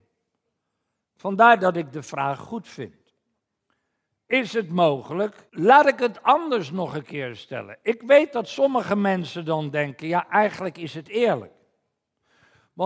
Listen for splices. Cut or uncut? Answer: cut